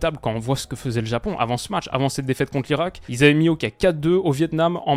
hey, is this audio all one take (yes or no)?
yes